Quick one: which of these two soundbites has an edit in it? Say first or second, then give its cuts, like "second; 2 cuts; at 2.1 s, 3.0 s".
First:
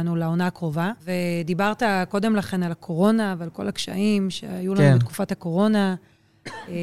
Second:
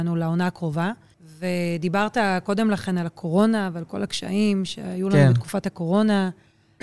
first; 1 cut; at 1.0 s